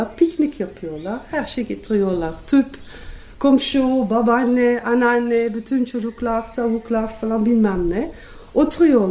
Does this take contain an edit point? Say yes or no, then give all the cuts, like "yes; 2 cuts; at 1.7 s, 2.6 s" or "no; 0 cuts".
no; 0 cuts